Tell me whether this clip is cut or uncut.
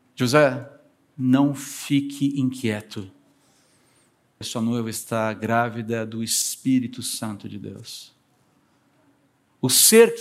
cut